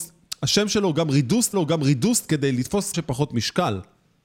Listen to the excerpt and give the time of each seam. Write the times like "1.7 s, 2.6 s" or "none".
1.5 s, 2.9 s